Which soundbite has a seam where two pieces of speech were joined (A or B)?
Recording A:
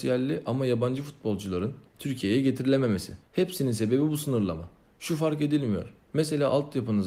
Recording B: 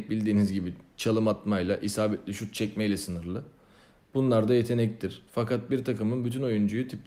A